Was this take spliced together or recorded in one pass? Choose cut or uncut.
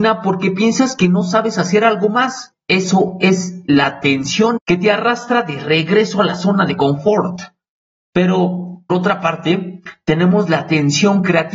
cut